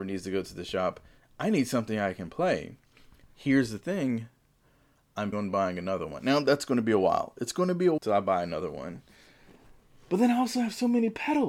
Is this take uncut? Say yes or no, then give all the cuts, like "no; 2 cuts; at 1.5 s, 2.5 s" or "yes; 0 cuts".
no; 2 cuts; at 5.3 s, 8.0 s